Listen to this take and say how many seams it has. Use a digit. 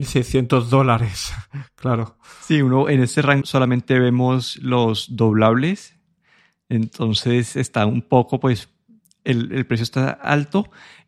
1